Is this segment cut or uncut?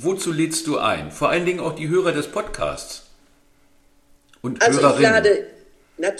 uncut